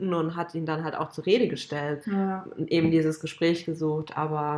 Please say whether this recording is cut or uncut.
cut